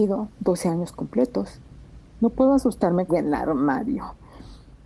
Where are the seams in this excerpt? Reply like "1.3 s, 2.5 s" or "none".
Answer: 3.1 s